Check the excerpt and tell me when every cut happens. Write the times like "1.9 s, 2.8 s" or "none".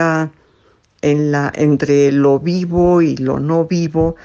none